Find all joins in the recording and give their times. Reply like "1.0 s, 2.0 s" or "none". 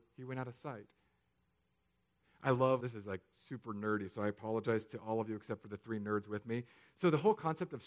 2.8 s